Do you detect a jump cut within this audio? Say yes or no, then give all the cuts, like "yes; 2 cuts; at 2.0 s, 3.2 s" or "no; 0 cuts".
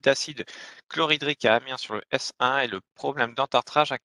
no; 0 cuts